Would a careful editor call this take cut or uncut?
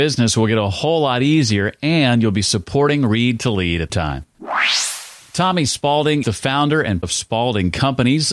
cut